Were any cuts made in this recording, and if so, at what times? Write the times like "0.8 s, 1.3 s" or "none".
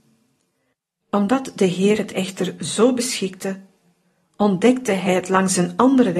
none